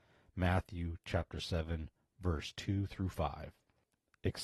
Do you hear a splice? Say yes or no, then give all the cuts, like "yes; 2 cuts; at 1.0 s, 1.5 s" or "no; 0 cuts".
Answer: no; 0 cuts